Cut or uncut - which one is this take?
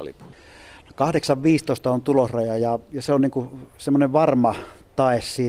uncut